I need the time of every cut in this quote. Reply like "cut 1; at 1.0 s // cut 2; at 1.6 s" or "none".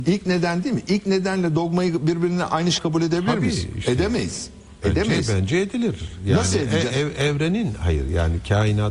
cut 1; at 2.8 s